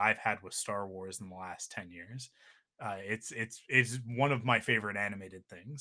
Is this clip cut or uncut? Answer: uncut